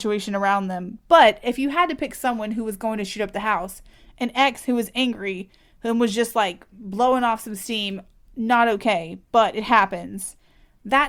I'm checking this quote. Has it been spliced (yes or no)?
no